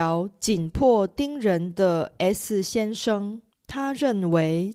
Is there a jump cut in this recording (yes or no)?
yes